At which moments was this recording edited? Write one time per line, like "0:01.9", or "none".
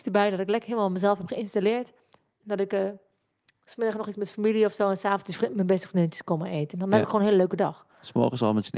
none